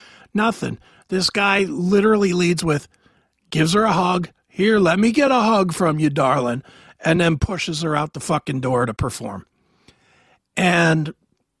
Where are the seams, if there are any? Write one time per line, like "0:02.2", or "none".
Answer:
none